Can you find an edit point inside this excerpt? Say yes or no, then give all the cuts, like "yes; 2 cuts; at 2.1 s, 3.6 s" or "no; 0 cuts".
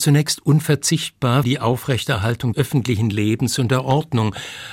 yes; 2 cuts; at 1.4 s, 2.5 s